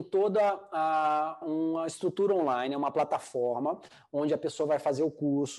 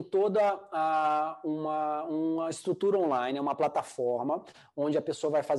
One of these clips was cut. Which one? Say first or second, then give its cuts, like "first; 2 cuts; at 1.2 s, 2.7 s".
first; 1 cut; at 1.4 s